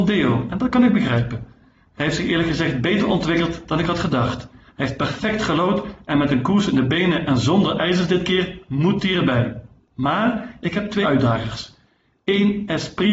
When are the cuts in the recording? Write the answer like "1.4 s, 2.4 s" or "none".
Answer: 11.0 s